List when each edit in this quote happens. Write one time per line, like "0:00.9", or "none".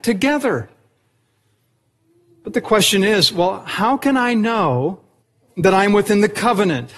0:05.2